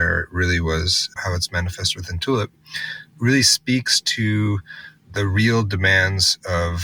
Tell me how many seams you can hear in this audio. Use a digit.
1